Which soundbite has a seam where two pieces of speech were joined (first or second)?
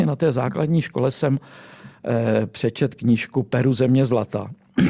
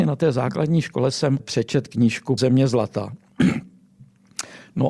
second